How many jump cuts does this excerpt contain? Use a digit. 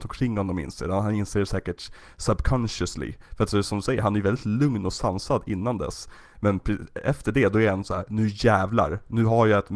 0